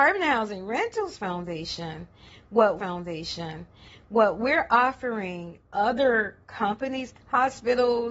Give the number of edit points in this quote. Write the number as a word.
three